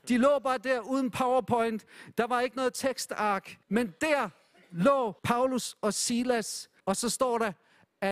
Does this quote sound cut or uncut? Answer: cut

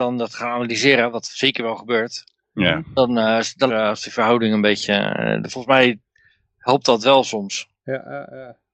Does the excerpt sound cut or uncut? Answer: cut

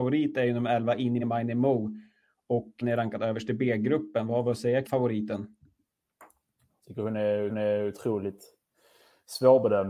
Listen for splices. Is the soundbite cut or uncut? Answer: cut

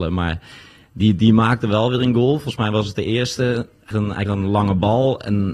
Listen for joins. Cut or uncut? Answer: cut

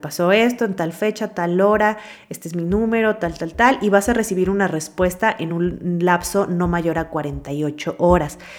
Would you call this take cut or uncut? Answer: uncut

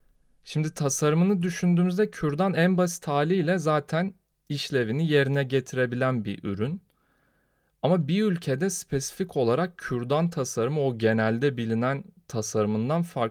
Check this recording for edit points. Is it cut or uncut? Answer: uncut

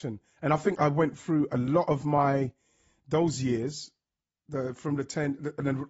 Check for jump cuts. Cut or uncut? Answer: uncut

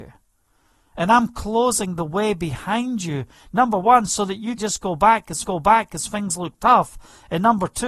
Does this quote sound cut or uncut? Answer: cut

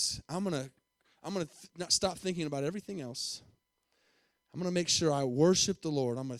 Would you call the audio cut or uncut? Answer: uncut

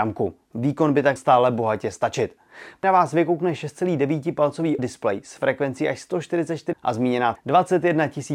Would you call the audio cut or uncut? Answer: cut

